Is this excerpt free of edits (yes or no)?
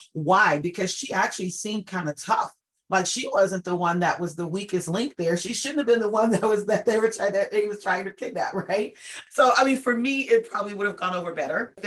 yes